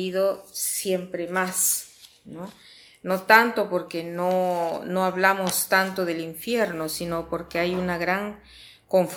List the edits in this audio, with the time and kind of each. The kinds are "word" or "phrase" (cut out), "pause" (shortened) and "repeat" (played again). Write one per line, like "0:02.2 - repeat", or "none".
none